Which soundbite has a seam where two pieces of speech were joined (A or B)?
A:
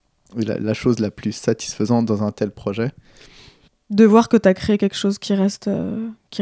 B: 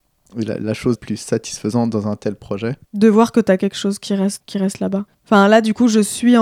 B